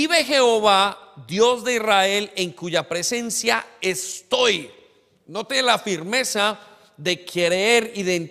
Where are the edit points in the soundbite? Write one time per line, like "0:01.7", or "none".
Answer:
none